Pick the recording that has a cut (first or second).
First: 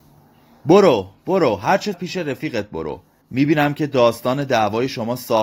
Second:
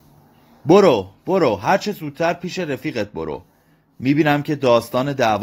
first